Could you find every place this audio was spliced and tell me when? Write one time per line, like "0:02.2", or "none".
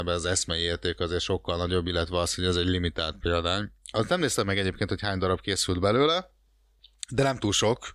0:03.8